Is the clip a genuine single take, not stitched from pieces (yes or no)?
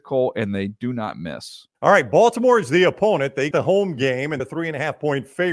no